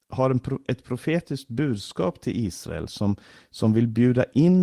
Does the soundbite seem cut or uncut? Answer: uncut